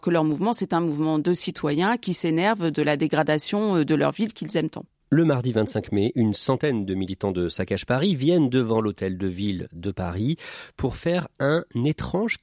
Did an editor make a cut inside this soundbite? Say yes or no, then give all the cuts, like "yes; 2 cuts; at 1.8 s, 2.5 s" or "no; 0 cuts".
no; 0 cuts